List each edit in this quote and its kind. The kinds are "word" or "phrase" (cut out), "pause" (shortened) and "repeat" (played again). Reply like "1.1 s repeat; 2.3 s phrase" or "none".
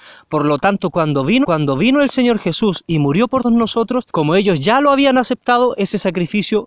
1.4 s repeat; 3.4 s word; 4.1 s pause